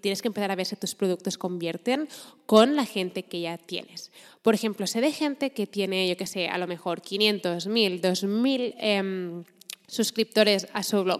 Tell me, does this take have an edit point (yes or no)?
no